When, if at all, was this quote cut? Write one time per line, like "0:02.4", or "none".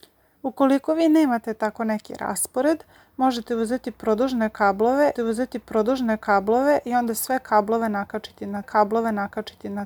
0:05.2
0:08.6